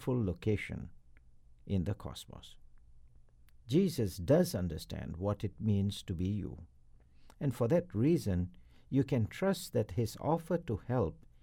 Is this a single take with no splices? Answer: yes; 0 cuts

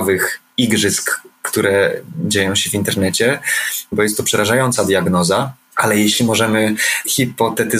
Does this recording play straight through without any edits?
yes; 0 cuts

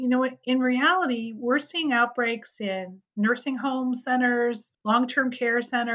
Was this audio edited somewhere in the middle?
yes; 1 cut; at 4.7 s

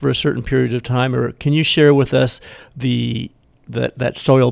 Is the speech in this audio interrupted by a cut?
no; 0 cuts

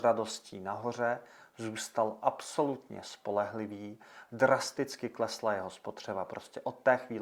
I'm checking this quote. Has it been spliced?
no; 0 cuts

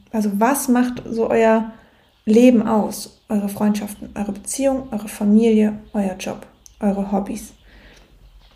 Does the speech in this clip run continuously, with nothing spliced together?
yes; 0 cuts

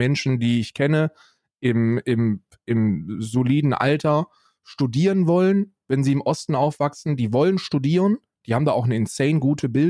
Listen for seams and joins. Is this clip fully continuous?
yes; 0 cuts

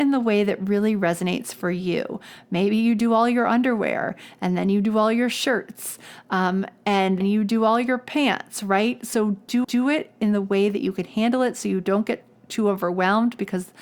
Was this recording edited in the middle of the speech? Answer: yes; 2 cuts; at 7.2 s, 9.6 s

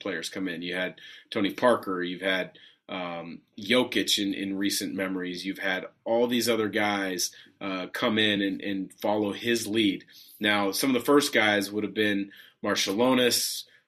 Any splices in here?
no; 0 cuts

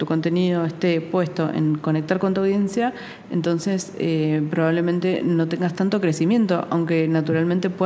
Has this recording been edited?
no; 0 cuts

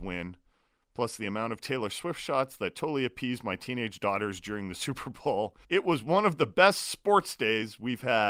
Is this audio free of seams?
no; 1 cut; at 5.6 s

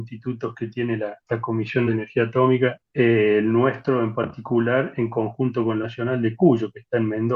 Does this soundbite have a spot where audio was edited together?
yes; 3 cuts; at 1.9 s, 2.9 s, 5.8 s

